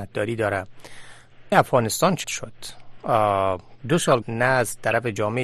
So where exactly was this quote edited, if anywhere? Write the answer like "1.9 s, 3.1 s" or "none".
1.5 s, 2.2 s, 4.2 s